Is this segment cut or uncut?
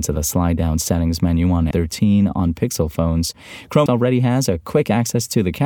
cut